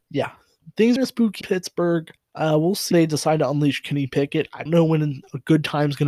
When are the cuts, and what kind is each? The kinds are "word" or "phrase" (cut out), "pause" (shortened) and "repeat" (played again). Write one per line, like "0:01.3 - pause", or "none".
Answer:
0:01.0 - phrase
0:01.4 - word
0:02.2 - pause
0:02.9 - word
0:04.7 - word